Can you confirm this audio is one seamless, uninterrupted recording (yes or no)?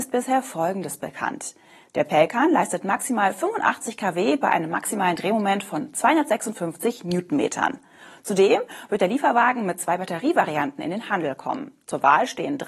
yes